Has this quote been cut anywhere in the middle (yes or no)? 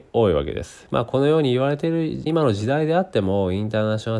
yes